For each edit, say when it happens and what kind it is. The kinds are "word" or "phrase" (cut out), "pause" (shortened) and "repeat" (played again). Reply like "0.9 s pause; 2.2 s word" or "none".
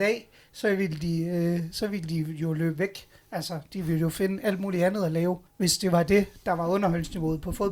5.5 s pause